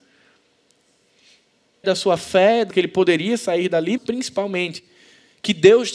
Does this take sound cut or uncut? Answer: cut